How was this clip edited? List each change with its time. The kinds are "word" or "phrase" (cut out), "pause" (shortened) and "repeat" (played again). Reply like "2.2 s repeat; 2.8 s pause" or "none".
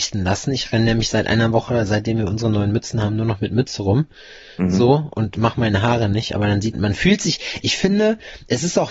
6.7 s word